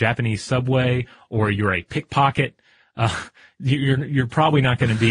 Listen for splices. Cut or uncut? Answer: uncut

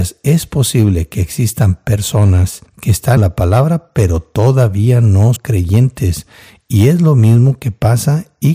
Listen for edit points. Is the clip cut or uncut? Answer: cut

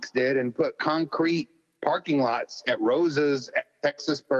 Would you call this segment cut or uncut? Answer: uncut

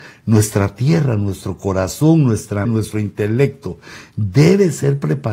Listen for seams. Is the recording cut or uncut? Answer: cut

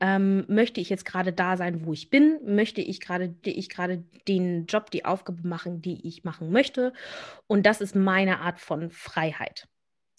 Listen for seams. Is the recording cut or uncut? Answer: cut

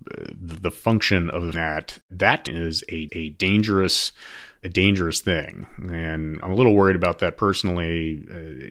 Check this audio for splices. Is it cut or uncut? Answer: cut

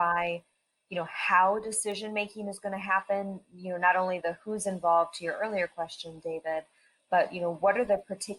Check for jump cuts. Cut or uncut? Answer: cut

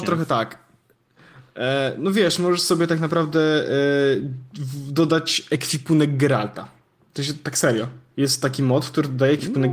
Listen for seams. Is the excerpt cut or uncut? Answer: uncut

